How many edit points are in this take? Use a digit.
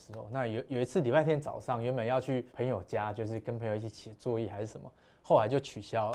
1